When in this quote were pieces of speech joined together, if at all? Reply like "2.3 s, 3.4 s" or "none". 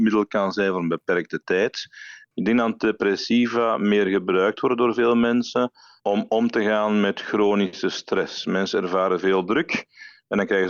none